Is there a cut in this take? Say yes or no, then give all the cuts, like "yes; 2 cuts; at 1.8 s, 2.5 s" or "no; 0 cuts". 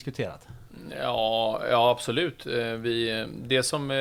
no; 0 cuts